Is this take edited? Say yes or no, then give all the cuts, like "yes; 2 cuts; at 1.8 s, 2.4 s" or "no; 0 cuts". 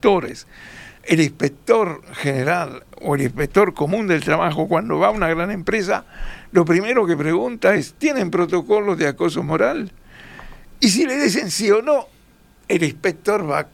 no; 0 cuts